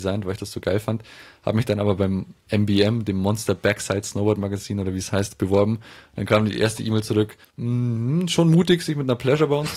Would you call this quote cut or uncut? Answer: cut